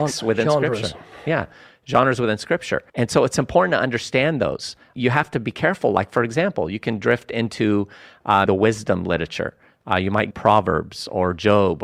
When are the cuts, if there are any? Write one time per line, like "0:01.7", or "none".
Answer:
0:02.9
0:08.5
0:10.3